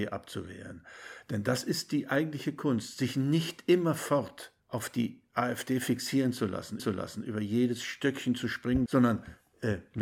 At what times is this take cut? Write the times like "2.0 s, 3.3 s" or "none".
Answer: 4.6 s, 6.8 s, 8.9 s